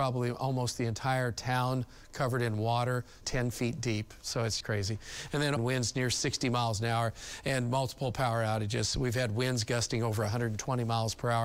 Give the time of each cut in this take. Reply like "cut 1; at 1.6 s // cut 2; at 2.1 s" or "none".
cut 1; at 3.2 s // cut 2; at 4.6 s // cut 3; at 5.6 s